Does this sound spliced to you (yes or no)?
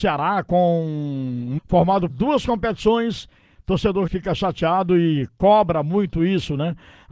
yes